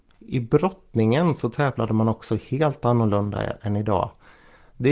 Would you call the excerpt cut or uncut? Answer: uncut